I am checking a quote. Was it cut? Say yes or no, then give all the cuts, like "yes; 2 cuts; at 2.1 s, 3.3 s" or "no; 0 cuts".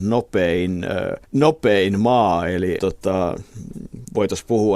yes; 2 cuts; at 1.2 s, 2.8 s